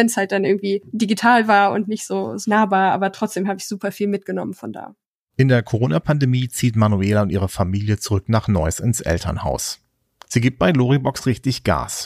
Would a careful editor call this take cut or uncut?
uncut